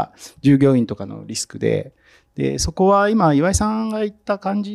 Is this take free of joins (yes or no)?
yes